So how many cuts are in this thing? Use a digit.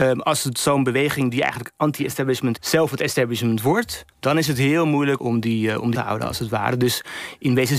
4